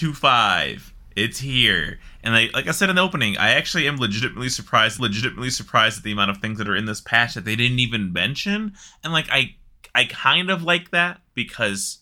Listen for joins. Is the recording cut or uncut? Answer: cut